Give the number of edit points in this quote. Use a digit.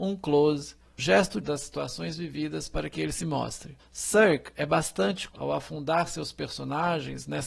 4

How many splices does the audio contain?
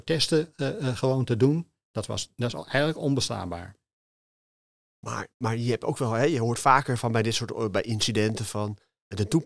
1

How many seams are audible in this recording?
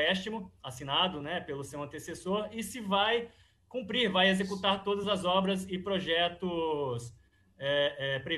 0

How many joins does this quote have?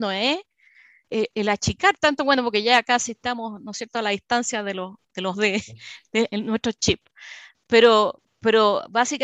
1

